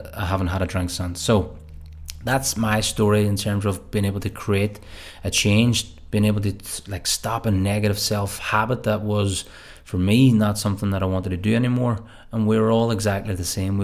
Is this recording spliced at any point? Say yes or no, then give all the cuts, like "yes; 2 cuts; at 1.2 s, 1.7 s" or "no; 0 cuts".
no; 0 cuts